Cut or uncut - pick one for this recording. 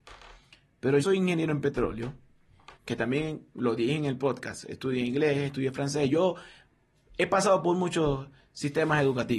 cut